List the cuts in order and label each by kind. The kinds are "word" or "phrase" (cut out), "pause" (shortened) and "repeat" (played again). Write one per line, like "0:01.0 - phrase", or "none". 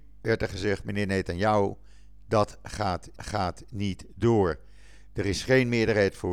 0:03.2 - repeat